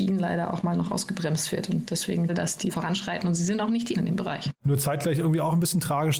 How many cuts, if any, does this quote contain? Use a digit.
3